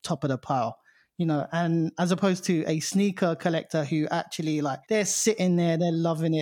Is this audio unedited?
no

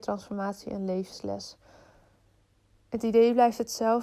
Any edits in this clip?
no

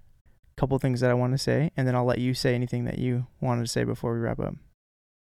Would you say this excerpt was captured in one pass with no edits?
yes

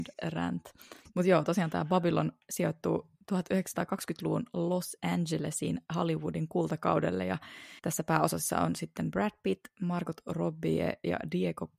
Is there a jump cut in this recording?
yes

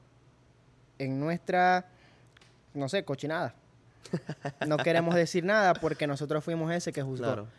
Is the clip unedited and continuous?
yes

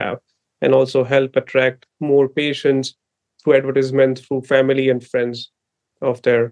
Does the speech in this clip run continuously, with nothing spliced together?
yes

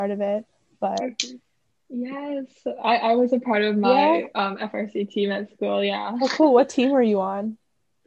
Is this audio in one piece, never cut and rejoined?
yes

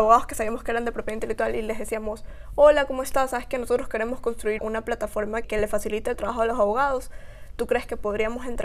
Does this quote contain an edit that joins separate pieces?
yes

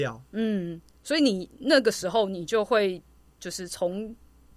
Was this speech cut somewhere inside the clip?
no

